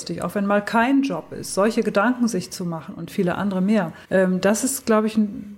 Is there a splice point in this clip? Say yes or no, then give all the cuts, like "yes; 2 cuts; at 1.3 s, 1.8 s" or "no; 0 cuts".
yes; 1 cut; at 4.0 s